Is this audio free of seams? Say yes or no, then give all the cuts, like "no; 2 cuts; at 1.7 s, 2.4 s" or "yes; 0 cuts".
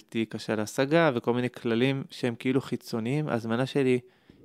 yes; 0 cuts